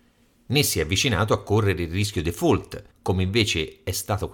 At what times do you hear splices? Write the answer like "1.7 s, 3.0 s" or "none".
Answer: 2.2 s